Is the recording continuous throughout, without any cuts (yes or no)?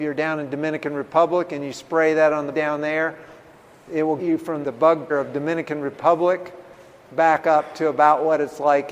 no